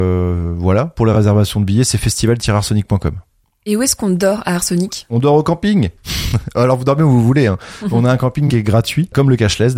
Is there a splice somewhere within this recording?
no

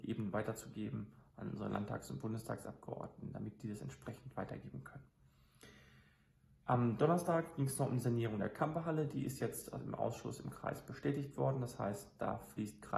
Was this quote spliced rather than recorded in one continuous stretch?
no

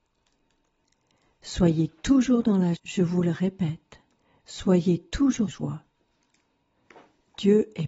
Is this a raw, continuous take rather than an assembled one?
no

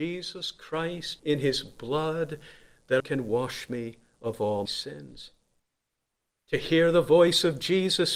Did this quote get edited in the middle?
yes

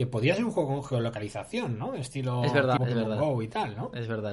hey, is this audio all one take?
no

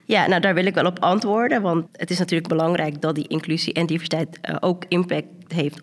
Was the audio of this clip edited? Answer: yes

